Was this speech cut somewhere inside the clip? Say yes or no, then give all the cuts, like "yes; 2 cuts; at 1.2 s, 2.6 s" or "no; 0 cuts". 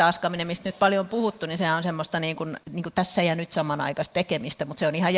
yes; 1 cut; at 2.6 s